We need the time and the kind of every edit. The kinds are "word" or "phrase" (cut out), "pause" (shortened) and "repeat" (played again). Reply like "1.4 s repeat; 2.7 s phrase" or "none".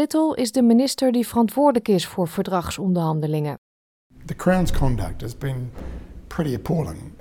none